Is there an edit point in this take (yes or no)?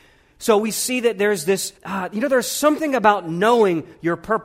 yes